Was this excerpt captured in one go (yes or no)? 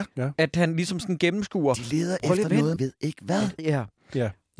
no